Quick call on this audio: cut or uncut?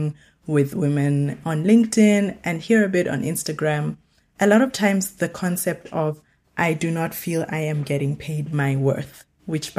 uncut